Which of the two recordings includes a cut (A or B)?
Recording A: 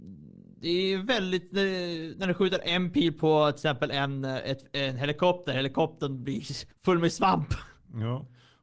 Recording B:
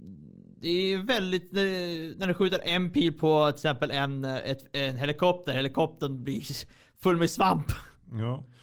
A